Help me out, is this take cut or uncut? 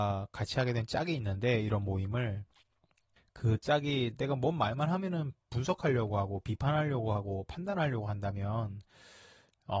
uncut